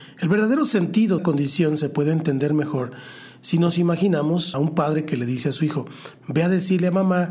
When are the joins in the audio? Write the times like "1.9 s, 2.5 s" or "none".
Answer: 1.2 s, 4.5 s